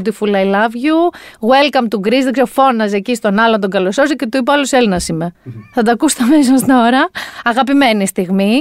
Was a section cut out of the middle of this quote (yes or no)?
yes